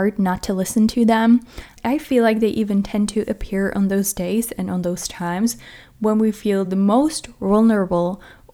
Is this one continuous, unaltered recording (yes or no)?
yes